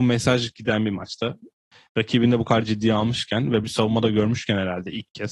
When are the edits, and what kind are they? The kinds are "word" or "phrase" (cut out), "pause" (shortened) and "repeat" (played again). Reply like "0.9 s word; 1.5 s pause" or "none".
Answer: 3.6 s word